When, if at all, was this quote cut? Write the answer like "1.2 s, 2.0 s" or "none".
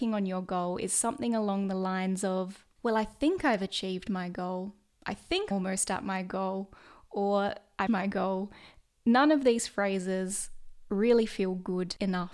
2.7 s, 5.5 s, 7.9 s